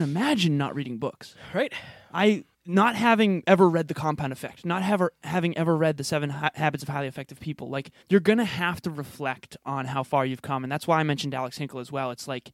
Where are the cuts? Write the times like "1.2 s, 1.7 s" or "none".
2.5 s, 8.0 s